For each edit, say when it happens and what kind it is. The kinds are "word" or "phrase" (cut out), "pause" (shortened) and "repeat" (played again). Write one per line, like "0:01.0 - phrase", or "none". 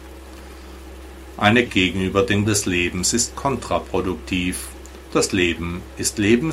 0:01.7 - phrase
0:02.4 - word